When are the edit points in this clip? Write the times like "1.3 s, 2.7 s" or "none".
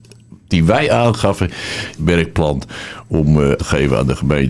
2.0 s, 3.6 s